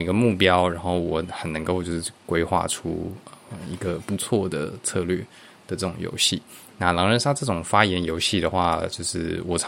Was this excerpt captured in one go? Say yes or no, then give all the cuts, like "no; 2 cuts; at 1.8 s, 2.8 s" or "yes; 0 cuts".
yes; 0 cuts